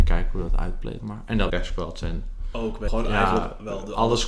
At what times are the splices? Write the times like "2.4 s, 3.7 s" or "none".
1.0 s, 1.5 s, 2.9 s